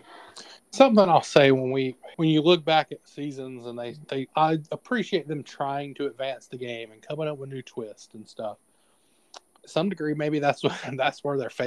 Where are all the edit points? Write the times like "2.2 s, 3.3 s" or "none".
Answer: 2.1 s, 4.3 s